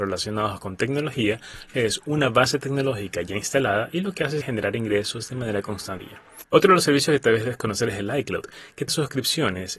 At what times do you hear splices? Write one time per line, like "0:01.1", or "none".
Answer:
0:01.7
0:04.4
0:06.0
0:08.9